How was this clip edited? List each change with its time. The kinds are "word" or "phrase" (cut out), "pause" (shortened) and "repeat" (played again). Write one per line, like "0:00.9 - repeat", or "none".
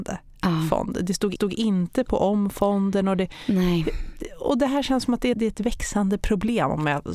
0:01.4 - repeat
0:05.3 - word